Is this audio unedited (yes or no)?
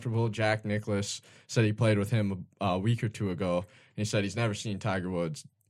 yes